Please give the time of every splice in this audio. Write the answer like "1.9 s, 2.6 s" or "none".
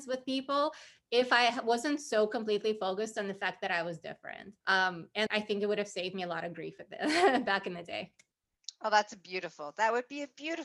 4.6 s, 5.3 s